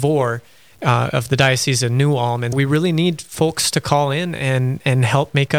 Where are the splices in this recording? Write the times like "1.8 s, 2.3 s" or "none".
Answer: 2.5 s